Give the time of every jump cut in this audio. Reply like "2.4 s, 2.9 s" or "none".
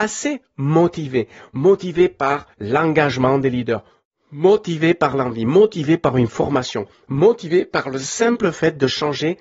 2.5 s